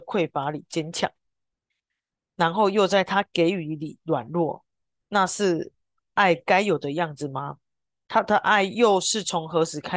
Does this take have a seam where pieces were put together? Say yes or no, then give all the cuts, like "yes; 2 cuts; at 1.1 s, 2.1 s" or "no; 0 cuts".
no; 0 cuts